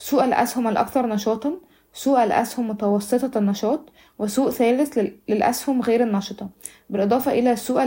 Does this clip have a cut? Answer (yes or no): no